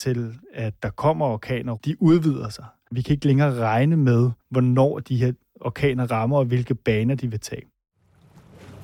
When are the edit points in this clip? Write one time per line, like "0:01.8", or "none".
0:04.4